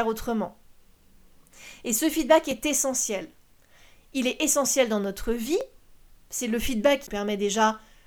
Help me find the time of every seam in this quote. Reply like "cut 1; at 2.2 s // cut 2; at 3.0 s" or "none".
none